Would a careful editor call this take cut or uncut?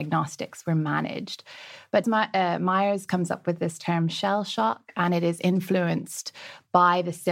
cut